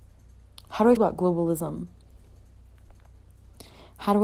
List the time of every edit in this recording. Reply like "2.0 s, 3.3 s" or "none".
1.0 s